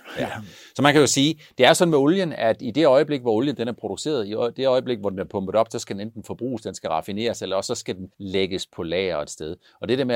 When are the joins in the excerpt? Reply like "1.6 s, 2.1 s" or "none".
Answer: 8.1 s